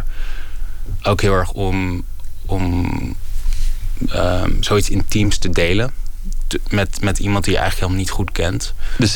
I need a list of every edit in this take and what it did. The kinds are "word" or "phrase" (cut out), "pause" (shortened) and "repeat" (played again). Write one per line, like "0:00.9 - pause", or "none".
none